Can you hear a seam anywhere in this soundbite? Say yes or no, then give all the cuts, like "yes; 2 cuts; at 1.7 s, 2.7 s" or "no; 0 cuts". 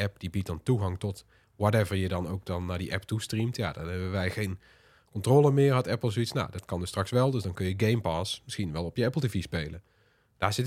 no; 0 cuts